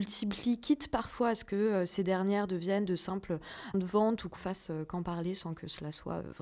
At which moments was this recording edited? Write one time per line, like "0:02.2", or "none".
0:03.7
0:04.4